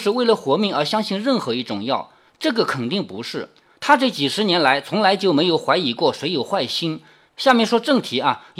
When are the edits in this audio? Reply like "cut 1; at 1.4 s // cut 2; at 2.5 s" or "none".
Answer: none